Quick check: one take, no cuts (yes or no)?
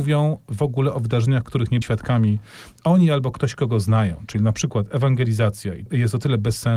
no